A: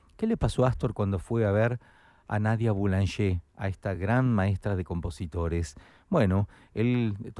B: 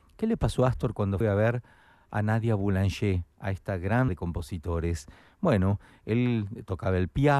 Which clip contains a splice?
B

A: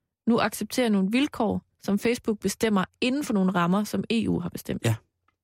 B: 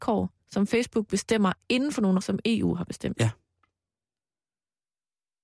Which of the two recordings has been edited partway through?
B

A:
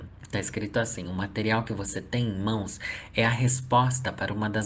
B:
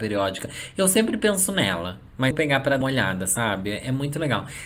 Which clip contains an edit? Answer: B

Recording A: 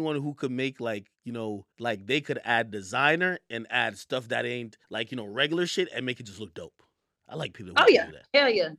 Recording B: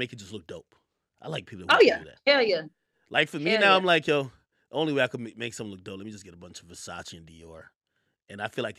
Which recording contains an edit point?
A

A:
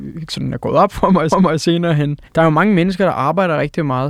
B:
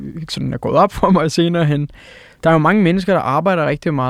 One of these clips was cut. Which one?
A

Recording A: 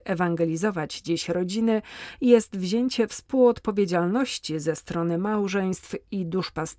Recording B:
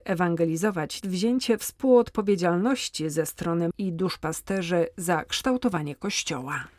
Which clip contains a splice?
B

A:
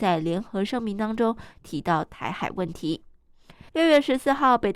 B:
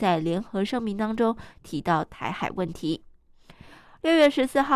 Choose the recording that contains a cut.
A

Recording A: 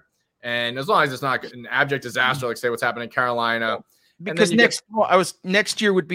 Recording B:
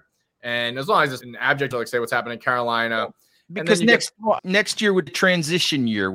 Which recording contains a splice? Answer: B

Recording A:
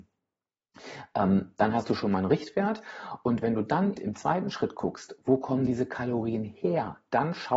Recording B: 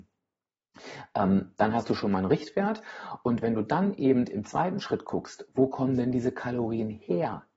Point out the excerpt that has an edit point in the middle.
A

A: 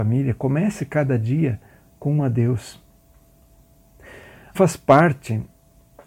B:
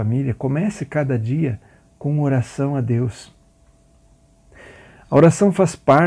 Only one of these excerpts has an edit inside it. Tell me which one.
A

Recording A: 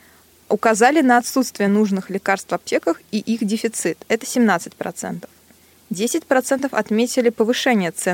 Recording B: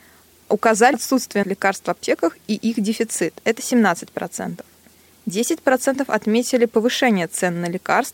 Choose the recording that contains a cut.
B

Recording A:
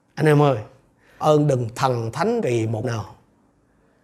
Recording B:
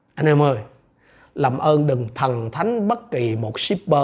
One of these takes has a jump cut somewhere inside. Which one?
A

